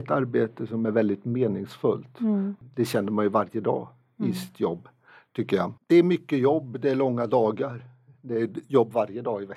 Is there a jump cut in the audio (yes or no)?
yes